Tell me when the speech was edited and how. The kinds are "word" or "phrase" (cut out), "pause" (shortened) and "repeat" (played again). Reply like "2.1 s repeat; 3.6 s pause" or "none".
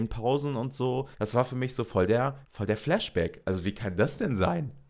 1.1 s pause; 2.4 s pause